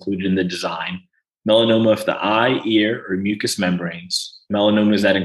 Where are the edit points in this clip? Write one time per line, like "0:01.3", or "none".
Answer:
none